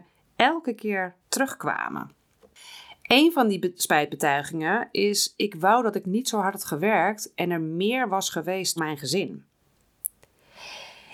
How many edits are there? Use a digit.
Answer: 2